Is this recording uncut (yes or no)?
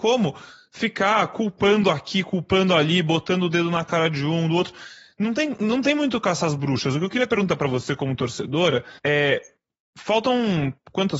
no